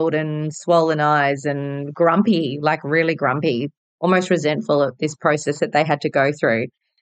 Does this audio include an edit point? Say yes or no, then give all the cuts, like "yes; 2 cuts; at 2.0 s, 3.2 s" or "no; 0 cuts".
no; 0 cuts